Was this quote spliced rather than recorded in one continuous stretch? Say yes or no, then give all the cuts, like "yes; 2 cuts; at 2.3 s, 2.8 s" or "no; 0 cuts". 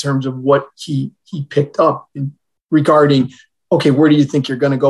no; 0 cuts